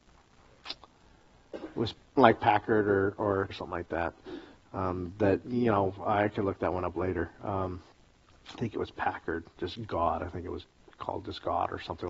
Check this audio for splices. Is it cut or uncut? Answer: cut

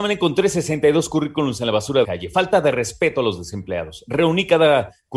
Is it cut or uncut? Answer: cut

